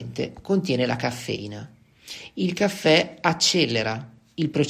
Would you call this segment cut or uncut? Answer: uncut